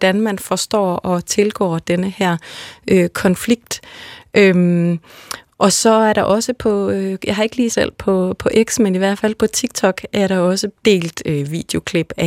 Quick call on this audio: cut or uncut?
cut